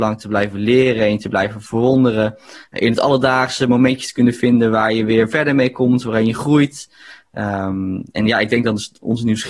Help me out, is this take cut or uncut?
uncut